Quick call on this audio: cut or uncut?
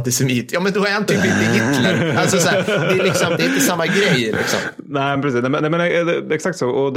uncut